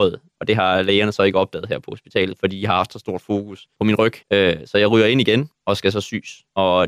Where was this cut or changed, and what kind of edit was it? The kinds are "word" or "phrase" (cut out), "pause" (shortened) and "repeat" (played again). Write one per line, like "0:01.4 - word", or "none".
0:04.2 - pause